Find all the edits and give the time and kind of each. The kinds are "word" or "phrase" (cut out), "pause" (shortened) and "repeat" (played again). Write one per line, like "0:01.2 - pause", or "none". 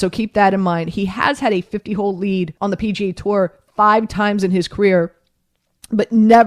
0:02.6 - pause